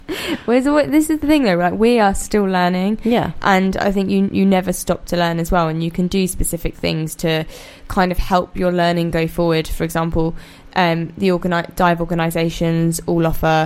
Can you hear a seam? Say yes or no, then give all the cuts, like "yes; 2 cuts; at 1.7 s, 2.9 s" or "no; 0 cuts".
no; 0 cuts